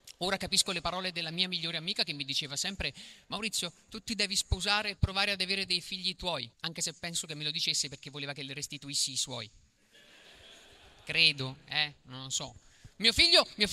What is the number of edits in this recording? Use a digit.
1